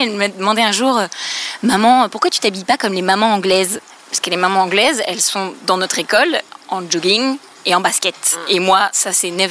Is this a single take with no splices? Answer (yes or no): yes